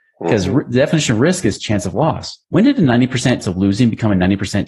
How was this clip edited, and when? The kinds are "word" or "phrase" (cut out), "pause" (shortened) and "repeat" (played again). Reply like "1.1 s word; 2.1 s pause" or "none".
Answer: 2.4 s pause; 3.4 s word

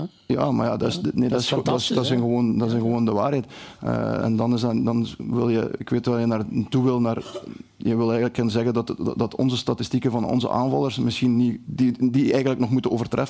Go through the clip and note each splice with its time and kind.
4.2 s word

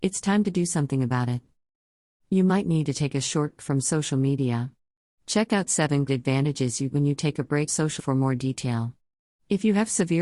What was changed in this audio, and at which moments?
3.6 s word; 6.1 s word; 6.9 s word; 7.7 s word; 8.0 s word

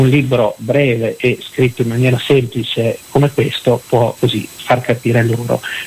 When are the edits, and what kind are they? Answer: 4.2 s word

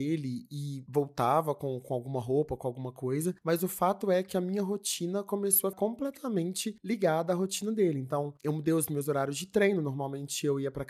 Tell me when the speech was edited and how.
5.7 s word

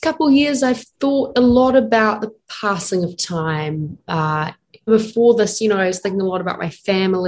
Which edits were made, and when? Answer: 0.9 s pause; 4.9 s word

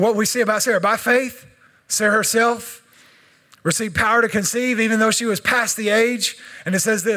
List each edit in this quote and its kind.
none

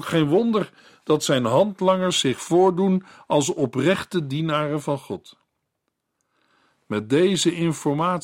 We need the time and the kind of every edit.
none

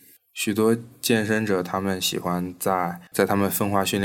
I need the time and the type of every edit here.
3.1 s pause

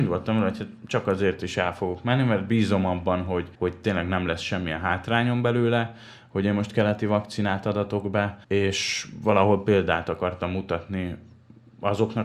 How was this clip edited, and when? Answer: 3.5 s pause; 8.4 s pause

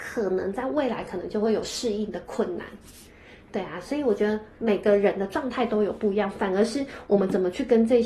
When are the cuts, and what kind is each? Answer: none

